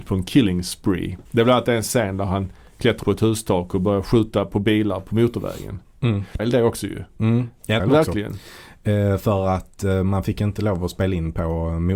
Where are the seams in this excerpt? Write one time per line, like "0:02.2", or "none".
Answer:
0:01.3
0:03.0
0:06.4
0:07.8